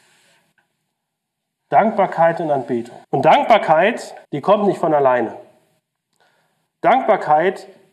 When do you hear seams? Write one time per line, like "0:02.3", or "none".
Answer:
0:03.0
0:04.2